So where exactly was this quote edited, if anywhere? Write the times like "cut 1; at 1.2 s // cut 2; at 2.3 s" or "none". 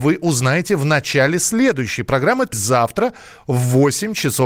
cut 1; at 2.5 s